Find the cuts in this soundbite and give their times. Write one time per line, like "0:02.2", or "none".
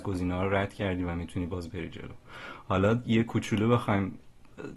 none